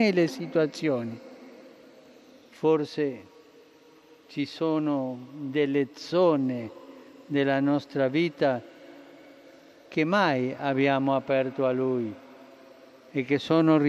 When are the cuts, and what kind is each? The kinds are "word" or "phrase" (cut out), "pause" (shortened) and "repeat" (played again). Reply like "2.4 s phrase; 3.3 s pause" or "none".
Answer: none